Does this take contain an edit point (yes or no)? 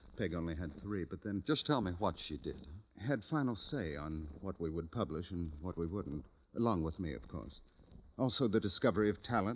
no